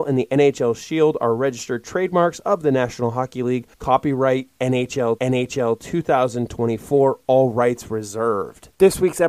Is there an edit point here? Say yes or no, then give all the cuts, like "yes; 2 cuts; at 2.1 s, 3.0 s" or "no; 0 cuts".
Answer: yes; 2 cuts; at 3.7 s, 5.2 s